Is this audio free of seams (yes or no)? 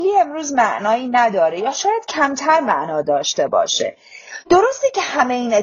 yes